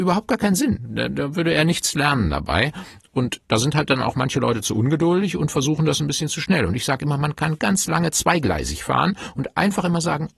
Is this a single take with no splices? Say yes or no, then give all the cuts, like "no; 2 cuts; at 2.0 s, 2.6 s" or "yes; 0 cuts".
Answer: no; 1 cut; at 7.6 s